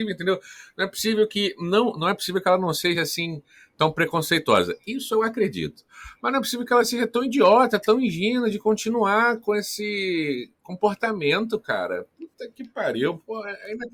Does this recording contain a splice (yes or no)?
no